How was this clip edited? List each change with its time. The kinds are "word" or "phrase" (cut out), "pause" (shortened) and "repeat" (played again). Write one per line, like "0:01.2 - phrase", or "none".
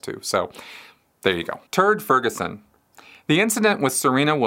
0:01.7 - pause

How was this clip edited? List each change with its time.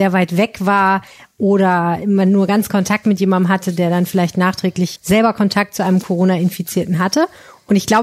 0:02.7 - word
0:05.0 - word

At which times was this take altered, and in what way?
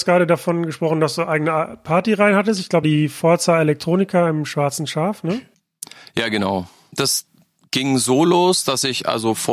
0:02.8 - phrase

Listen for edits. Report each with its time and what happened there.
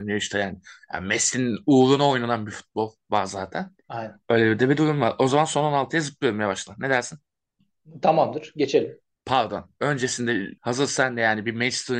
0:09.1 - pause
0:10.6 - pause

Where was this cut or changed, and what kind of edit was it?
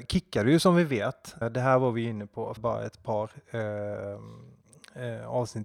0:01.4 - word
0:02.6 - word

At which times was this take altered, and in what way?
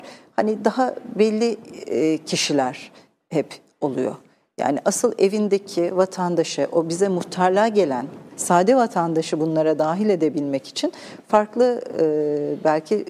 0:08.3 - word

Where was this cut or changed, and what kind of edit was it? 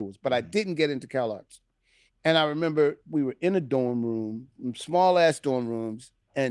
0:02.1 - pause
0:03.0 - pause

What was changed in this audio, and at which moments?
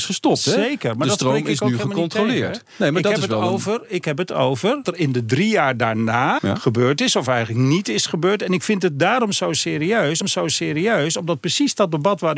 0:04.8 - word
0:06.4 - word
0:10.2 - repeat

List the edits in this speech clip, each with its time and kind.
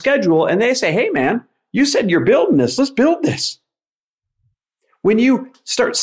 none

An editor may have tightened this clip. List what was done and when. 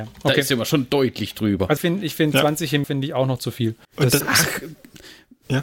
0:01.8 - word
0:02.8 - word
0:03.8 - pause
0:04.2 - word

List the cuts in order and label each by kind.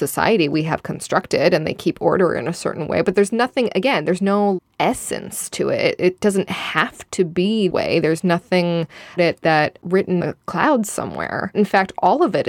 0:07.7 - word
0:09.2 - word
0:10.2 - word
0:11.5 - word

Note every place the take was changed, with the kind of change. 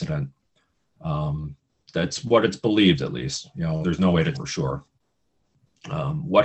0:03.8 - word
0:04.3 - word

